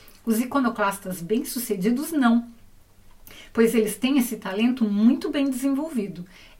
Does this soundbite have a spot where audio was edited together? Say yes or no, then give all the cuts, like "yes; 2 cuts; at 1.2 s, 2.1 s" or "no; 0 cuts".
no; 0 cuts